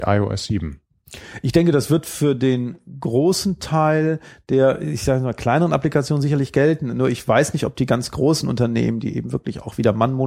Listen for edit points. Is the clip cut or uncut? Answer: uncut